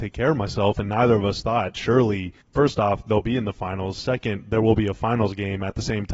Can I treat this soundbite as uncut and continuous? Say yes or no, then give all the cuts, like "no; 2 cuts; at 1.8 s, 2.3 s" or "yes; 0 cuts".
no; 1 cut; at 2.4 s